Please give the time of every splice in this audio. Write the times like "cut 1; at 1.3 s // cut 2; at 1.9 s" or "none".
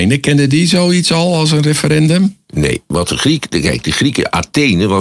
none